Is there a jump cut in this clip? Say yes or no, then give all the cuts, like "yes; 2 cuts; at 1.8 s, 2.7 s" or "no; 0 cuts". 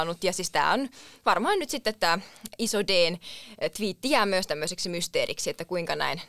no; 0 cuts